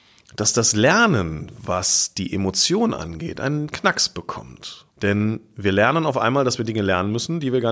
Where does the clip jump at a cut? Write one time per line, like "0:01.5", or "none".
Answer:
0:03.7
0:04.9